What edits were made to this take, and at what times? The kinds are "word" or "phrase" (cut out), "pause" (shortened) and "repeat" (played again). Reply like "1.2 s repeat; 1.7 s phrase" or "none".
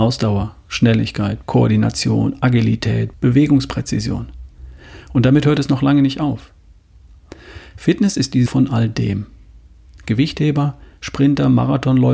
1.4 s word; 3.1 s word; 8.5 s word

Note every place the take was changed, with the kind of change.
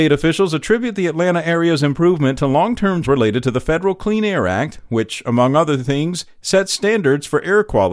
3.0 s word

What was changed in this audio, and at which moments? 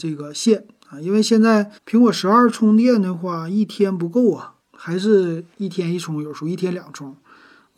1.8 s pause; 4.6 s pause; 5.5 s pause

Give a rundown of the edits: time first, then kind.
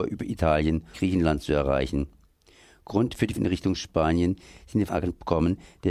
0.9 s word; 3.4 s word; 4.9 s word

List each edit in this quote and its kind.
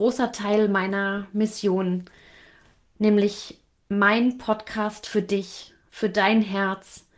3.7 s pause

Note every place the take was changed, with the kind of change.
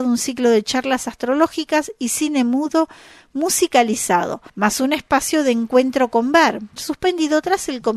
4.5 s pause; 6.8 s phrase

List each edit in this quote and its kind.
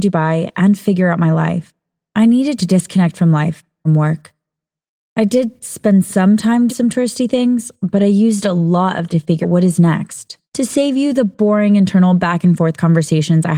2.6 s word; 3.9 s phrase; 6.7 s word; 9.1 s word; 9.4 s word; 10.4 s pause

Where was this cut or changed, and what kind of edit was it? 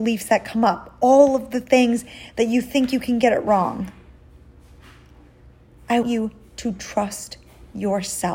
6.0 s word

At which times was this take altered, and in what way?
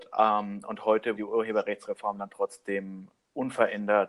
1.2 s word

